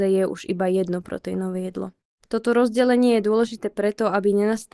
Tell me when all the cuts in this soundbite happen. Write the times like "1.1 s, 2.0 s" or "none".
2.2 s